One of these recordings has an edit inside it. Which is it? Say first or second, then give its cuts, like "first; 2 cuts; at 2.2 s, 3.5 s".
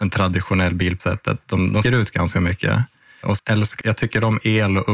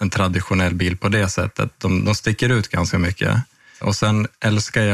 first; 4 cuts; at 1.0 s, 1.8 s, 3.4 s, 3.8 s